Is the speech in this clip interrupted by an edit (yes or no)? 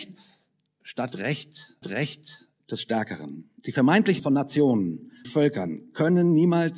yes